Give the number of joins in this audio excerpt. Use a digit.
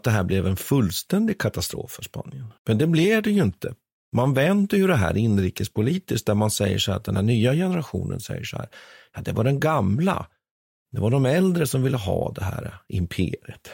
1